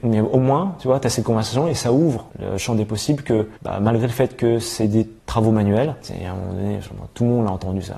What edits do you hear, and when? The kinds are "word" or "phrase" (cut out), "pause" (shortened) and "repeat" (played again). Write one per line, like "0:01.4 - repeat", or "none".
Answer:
0:02.3 - pause
0:03.6 - pause
0:05.2 - pause
0:06.0 - pause